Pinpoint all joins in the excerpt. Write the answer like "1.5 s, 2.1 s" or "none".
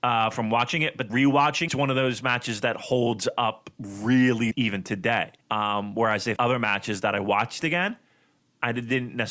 1.1 s, 1.7 s, 4.5 s, 5.4 s, 6.4 s